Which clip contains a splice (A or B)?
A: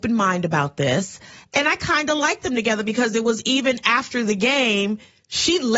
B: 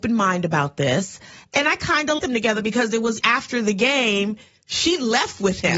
B